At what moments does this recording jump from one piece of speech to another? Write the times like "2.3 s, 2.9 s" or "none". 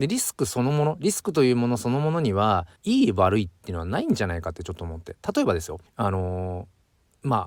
2.8 s, 5.9 s